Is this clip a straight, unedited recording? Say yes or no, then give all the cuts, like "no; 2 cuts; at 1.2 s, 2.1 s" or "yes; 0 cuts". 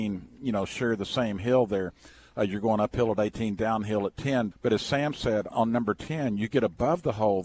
no; 2 cuts; at 4.5 s, 5.5 s